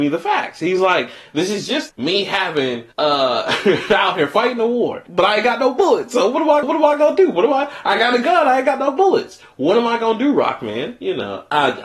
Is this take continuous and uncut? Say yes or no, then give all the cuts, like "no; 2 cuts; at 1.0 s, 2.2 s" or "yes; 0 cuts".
no; 3 cuts; at 1.9 s, 2.9 s, 6.6 s